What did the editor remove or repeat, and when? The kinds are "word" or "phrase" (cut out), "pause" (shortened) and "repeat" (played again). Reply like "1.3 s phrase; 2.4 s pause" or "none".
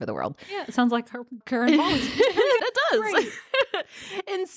1.4 s word; 2.6 s word